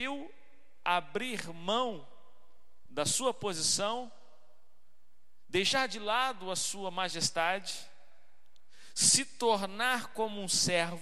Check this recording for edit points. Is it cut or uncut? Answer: uncut